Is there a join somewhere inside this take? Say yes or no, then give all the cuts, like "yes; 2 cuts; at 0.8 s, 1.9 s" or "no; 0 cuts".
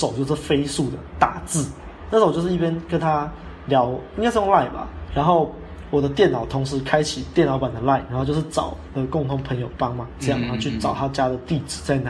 yes; 1 cut; at 5.1 s